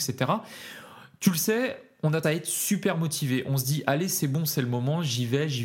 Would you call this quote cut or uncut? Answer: cut